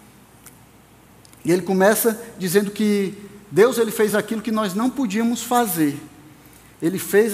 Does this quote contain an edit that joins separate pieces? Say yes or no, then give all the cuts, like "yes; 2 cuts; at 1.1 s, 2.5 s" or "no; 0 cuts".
no; 0 cuts